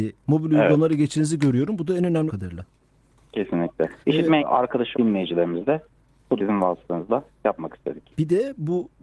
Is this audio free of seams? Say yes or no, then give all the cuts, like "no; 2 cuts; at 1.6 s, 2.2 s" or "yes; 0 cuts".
no; 5 cuts; at 2.3 s, 4.0 s, 4.4 s, 4.9 s, 6.4 s